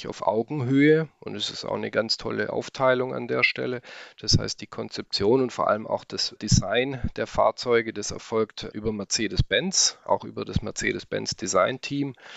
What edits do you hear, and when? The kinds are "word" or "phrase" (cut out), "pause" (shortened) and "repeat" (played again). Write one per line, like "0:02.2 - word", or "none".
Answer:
0:06.4 - word
0:08.7 - word